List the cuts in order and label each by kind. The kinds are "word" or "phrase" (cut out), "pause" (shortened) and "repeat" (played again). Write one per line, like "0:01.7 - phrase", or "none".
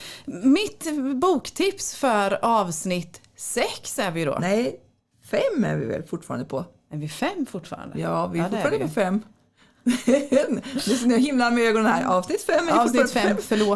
none